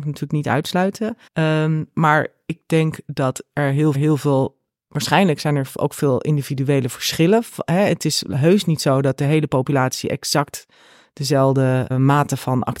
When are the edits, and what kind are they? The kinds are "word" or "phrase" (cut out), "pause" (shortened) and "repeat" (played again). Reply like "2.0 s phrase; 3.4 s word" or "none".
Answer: 1.3 s pause; 3.9 s repeat; 11.9 s word

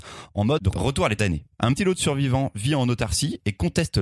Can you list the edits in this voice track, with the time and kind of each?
1.2 s phrase; 1.8 s word

